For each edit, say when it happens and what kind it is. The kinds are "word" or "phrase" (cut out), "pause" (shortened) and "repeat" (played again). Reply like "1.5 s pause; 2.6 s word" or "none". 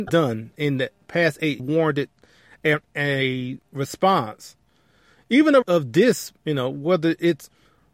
1.6 s phrase; 3.6 s pause; 5.6 s word; 6.4 s pause